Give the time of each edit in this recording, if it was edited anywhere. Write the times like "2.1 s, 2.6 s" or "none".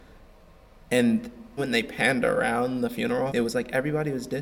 1.6 s, 3.3 s